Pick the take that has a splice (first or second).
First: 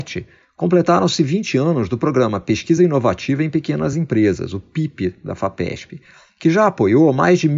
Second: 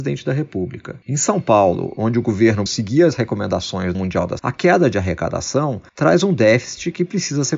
second